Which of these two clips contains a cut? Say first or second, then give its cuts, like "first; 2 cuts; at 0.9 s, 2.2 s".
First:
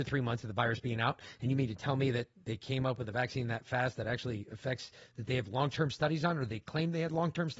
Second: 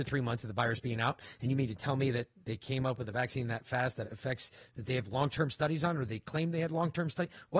second; 1 cut; at 4.0 s